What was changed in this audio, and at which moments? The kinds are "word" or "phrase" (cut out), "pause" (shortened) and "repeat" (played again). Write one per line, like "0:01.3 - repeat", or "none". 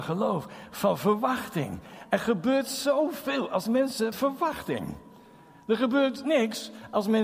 0:04.1 - phrase